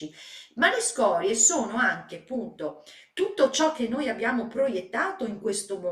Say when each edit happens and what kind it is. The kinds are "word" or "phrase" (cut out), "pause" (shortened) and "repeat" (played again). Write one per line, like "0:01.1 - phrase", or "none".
none